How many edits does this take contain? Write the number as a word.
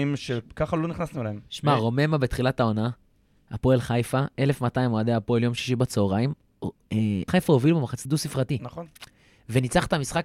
two